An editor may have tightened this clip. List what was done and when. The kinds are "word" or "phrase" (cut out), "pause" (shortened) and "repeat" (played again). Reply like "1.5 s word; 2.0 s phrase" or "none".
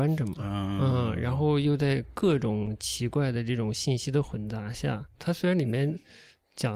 5.1 s word